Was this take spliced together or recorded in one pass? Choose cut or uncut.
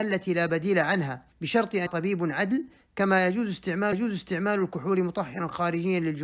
cut